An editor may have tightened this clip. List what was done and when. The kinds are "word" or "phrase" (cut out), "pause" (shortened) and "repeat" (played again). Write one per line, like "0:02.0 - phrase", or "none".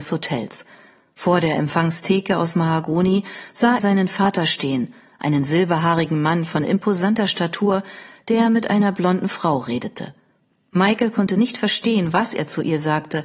0:03.8 - word